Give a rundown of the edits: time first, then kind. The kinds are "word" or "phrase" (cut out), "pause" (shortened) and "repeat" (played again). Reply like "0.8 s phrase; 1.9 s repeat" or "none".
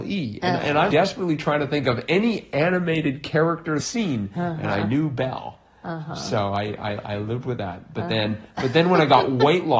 0.9 s word; 3.8 s phrase